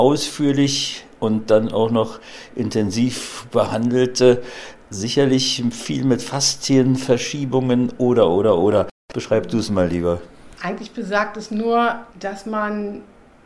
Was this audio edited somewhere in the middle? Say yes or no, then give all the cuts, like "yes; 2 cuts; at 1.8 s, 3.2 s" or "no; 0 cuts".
yes; 1 cut; at 12.1 s